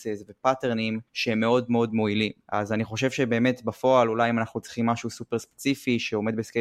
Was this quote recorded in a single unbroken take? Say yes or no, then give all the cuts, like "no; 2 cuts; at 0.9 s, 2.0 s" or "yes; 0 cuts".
no; 2 cuts; at 1.1 s, 2.4 s